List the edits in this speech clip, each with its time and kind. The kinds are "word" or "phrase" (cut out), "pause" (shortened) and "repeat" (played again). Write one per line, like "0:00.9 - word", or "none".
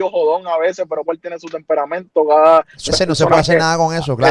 0:01.0 - phrase
0:02.9 - word